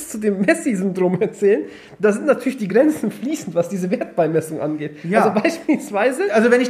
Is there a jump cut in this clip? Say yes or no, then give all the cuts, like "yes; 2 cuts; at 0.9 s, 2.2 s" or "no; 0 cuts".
no; 0 cuts